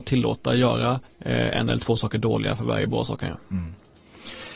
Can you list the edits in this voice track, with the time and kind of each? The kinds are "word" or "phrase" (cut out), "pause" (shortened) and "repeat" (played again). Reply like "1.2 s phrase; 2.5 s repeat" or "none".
1.0 s pause